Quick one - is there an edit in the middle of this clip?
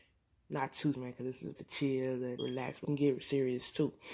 yes; 4 cuts; at 0.9 s, 1.6 s, 2.4 s, 2.8 s

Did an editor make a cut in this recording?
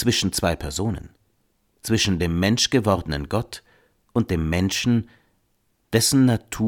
no; 0 cuts

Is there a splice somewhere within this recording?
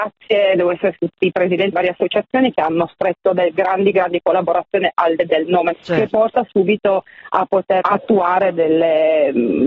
yes; 6 cuts; at 1.0 s, 1.7 s, 3.9 s, 5.2 s, 5.7 s, 7.8 s

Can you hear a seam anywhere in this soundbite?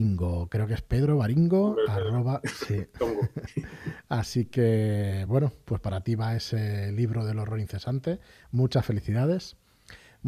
no; 0 cuts

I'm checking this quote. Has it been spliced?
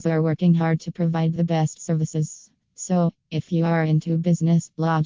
no; 0 cuts

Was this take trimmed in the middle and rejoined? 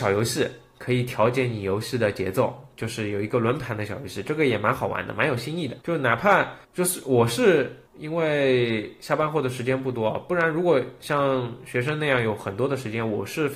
yes; 3 cuts; at 5.8 s, 6.6 s, 7.9 s

